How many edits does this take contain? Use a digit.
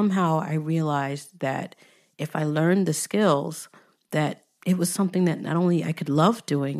0